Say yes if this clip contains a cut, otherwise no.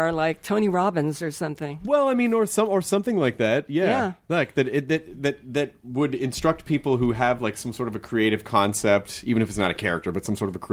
no